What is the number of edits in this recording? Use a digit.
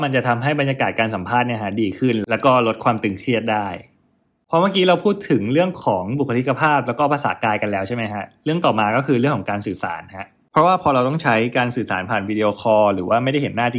0